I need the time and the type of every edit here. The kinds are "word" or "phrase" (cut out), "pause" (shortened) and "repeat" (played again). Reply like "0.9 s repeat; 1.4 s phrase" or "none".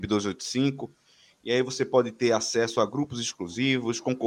none